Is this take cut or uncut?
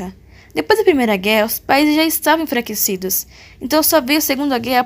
uncut